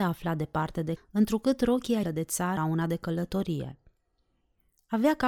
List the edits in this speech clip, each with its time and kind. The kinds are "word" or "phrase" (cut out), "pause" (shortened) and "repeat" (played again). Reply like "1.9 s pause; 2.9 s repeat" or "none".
1.0 s word; 2.0 s phrase; 2.6 s phrase